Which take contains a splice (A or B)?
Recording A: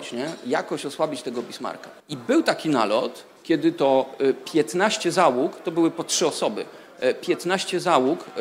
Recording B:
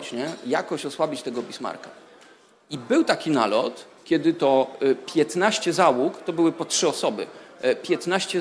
A